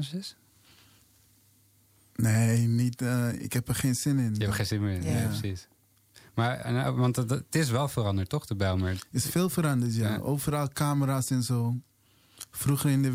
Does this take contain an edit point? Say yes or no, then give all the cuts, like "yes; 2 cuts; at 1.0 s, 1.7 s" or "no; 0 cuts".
no; 0 cuts